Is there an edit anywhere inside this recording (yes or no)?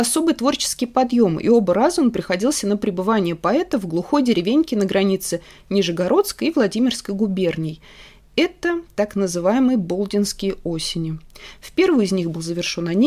no